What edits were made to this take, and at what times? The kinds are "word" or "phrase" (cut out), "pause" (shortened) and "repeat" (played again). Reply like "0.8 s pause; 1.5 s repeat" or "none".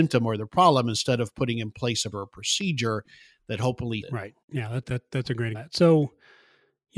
2.1 s word; 4.0 s word; 4.4 s pause; 4.8 s word; 5.5 s phrase